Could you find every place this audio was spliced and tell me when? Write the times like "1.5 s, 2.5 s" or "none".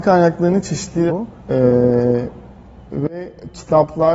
1.1 s, 1.4 s